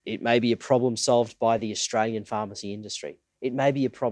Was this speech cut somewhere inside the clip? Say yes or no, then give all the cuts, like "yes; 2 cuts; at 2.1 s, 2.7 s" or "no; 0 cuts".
no; 0 cuts